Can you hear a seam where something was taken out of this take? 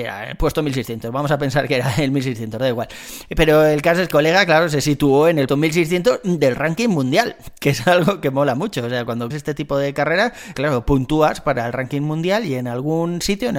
yes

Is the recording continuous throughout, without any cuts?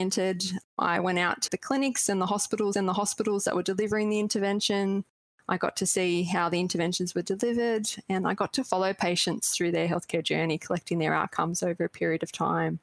no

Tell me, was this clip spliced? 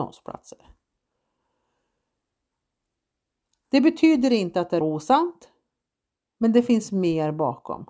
yes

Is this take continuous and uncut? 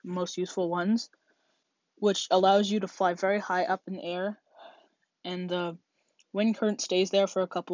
yes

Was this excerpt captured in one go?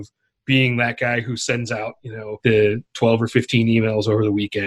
no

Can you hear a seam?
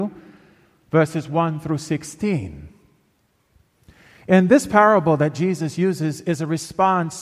no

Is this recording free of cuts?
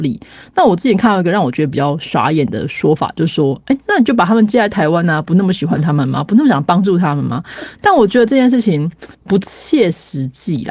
no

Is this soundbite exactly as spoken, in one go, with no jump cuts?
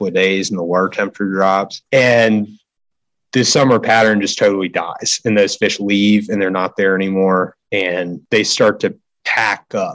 yes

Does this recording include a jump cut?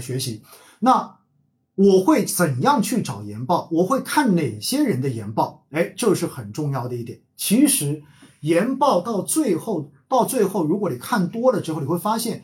no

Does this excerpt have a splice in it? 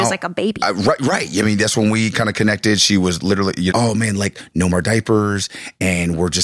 yes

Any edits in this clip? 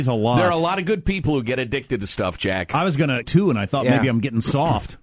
yes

